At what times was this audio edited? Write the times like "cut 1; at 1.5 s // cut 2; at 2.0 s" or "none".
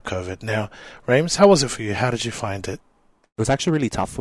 none